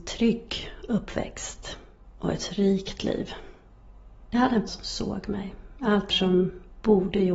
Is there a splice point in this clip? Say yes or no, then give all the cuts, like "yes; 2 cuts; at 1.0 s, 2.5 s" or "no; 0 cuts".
yes; 3 cuts; at 3.0 s, 4.7 s, 6.1 s